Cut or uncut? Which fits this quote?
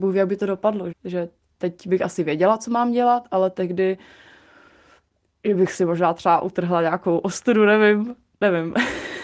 cut